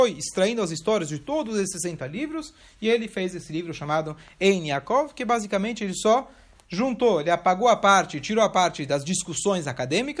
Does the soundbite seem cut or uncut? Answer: uncut